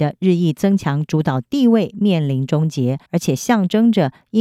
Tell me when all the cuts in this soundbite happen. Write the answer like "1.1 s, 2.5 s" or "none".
3.1 s